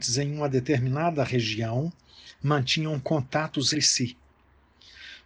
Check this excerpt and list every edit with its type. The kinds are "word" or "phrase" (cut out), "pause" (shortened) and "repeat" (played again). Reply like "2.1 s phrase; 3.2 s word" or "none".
3.7 s word